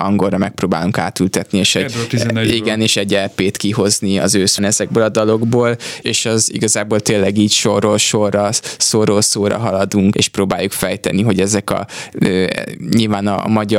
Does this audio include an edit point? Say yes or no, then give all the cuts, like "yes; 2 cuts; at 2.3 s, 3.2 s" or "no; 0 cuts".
yes; 3 cuts; at 4.6 s, 6.0 s, 10.1 s